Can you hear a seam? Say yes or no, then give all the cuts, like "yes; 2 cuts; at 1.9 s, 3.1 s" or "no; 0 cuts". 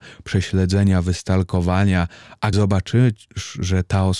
yes; 1 cut; at 2.5 s